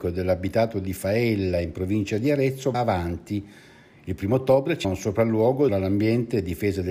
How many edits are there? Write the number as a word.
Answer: three